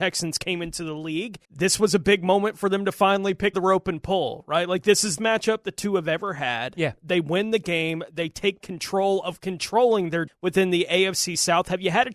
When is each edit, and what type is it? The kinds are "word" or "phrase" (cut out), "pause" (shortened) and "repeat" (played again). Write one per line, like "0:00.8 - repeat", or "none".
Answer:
0:01.4 - pause
0:03.5 - phrase
0:05.2 - phrase
0:08.6 - word
0:10.3 - word